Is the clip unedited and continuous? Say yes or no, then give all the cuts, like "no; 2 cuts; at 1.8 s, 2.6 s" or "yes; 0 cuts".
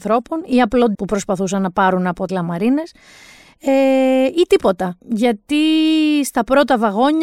no; 3 cuts; at 0.9 s, 2.3 s, 5.0 s